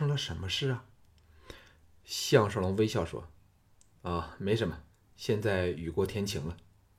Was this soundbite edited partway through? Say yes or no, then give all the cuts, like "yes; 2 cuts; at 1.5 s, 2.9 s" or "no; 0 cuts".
no; 0 cuts